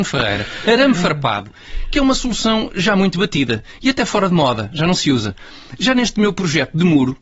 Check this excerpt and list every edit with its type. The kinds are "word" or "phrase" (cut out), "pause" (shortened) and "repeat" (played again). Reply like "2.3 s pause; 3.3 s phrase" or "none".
none